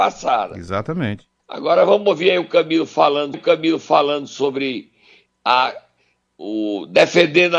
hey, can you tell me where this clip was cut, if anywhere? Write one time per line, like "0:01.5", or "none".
0:01.4
0:03.3